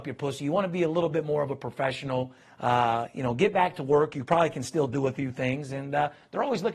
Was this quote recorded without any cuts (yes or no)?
yes